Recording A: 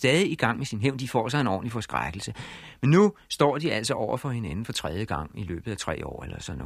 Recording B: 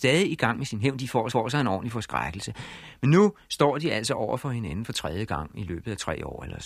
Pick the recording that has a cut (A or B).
B